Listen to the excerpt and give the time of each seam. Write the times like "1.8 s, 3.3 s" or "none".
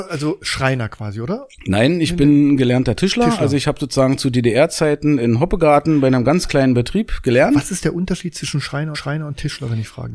8.9 s